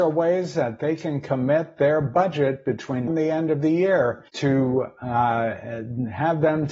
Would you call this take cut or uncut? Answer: cut